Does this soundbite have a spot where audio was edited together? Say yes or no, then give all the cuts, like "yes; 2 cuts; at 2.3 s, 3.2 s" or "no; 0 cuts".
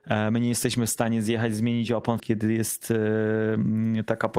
yes; 1 cut; at 2.2 s